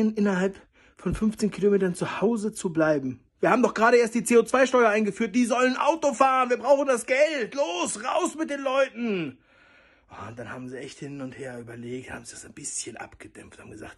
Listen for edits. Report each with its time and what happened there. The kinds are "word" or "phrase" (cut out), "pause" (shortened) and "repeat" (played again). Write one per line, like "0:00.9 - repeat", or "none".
0:03.3 - pause